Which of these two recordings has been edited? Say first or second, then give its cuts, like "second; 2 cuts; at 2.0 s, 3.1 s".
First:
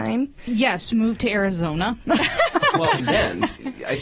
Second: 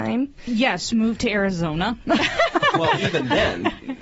first; 1 cut; at 3.0 s